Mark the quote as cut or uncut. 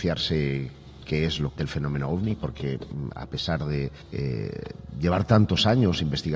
cut